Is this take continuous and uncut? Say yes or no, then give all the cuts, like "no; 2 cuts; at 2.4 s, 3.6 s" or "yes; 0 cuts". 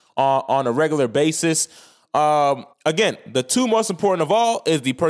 no; 1 cut; at 2.7 s